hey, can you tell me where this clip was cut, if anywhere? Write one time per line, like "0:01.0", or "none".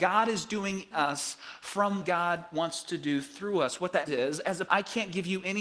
0:00.9
0:02.0
0:04.1
0:04.7